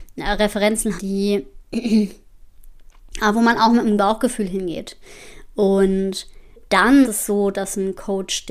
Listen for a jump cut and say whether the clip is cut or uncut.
cut